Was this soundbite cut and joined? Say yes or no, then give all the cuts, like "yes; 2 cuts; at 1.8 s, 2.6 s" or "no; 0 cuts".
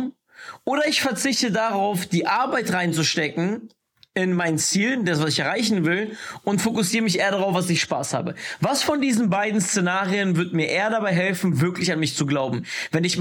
no; 0 cuts